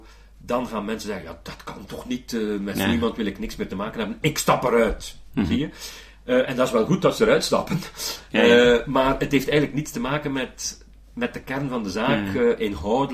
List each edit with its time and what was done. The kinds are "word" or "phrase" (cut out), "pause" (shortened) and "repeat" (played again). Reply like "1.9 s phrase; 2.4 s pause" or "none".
none